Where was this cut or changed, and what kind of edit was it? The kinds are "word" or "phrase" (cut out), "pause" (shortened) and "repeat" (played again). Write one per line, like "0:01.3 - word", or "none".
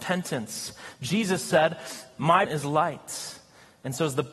0:02.5 - word